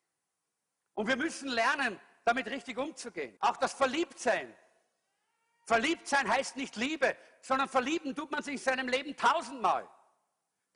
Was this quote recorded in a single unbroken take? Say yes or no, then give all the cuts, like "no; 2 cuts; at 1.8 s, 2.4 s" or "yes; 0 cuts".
no; 1 cut; at 3.4 s